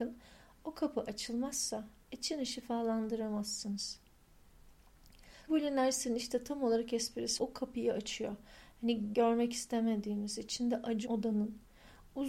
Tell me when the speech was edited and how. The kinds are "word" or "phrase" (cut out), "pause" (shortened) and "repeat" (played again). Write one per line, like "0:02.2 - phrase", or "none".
0:05.5 - word
0:07.4 - word
0:09.1 - word
0:11.1 - word